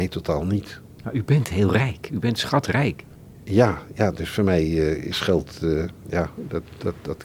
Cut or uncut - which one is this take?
uncut